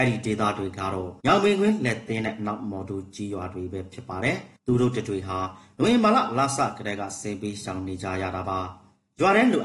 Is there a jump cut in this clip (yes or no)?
yes